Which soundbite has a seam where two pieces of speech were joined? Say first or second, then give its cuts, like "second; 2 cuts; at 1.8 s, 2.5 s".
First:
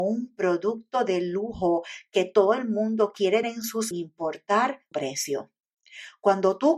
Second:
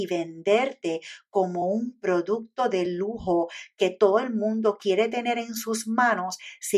first; 3 cuts; at 3.4 s, 3.9 s, 4.9 s